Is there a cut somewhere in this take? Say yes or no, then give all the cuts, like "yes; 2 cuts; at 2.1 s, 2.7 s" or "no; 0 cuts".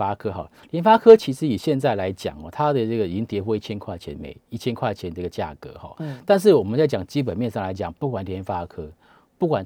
no; 0 cuts